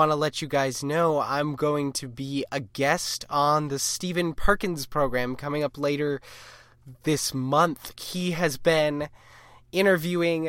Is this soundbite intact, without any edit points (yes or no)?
yes